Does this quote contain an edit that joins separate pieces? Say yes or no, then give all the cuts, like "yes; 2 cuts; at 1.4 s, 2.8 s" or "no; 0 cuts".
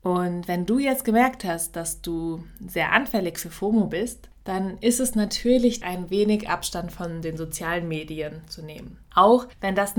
yes; 1 cut; at 5.8 s